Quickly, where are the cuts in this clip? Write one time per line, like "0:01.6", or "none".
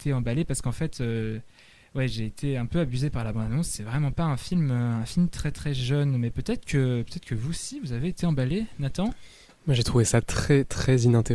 none